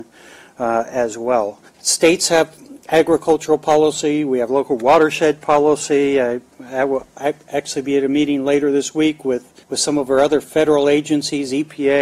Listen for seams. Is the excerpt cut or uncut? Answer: cut